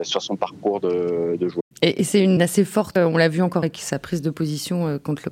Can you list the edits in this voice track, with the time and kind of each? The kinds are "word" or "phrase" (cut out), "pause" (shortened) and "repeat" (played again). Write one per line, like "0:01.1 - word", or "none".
0:01.7 - pause
0:02.4 - word
0:03.0 - word
0:03.6 - word